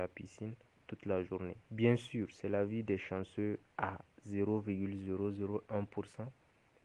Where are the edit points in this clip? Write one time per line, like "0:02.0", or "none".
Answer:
0:01.6
0:03.7